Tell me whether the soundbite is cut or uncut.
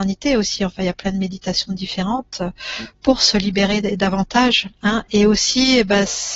uncut